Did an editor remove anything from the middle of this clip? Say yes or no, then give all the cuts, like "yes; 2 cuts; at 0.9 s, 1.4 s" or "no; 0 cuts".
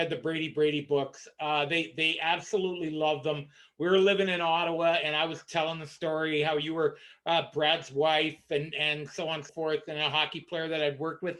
yes; 1 cut; at 9.5 s